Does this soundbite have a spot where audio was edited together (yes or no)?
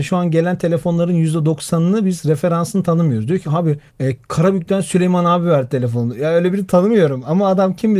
yes